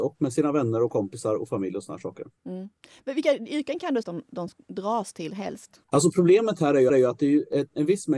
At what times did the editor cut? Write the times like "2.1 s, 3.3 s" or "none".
2.4 s, 4.0 s, 5.8 s, 6.9 s